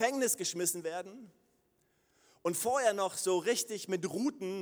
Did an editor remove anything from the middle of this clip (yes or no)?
no